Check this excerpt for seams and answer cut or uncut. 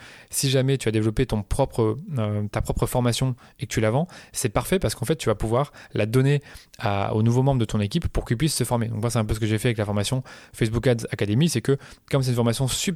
uncut